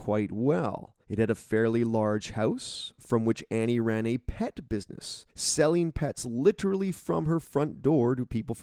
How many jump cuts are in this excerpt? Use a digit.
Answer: 2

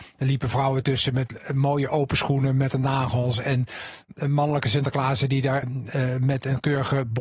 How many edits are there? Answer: 2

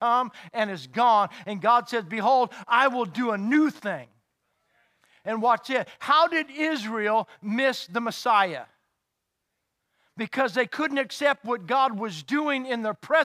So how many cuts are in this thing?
0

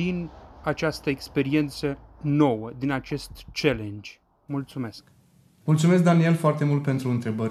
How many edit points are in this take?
0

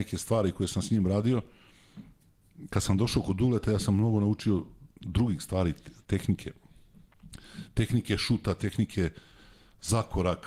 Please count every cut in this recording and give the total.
1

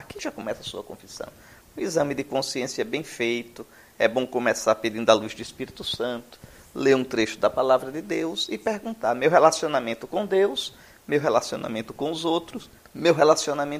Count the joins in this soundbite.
0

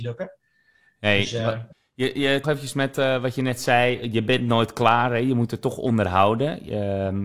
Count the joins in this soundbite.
2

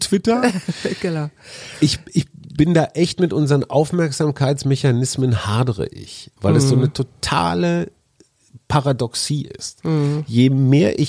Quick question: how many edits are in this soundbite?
0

